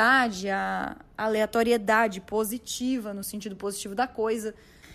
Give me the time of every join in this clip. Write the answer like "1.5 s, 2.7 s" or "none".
none